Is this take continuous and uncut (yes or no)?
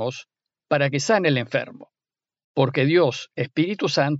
yes